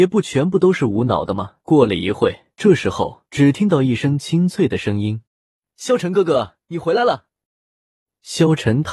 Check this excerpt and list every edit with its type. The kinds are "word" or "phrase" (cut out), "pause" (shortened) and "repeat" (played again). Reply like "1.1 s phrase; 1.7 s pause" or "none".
1.6 s pause; 2.5 s pause; 3.3 s pause; 5.3 s pause; 7.5 s pause